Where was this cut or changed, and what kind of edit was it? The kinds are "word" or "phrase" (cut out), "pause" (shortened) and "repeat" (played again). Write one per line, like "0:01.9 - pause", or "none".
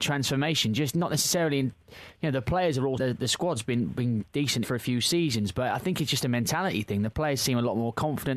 0:03.0 - phrase
0:04.6 - word